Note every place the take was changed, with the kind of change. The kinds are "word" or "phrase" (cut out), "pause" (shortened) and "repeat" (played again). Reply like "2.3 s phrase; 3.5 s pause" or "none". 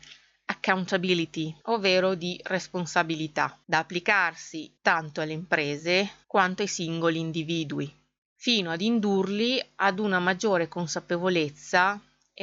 1.6 s pause; 3.6 s pause; 4.8 s pause; 6.2 s pause; 8.2 s pause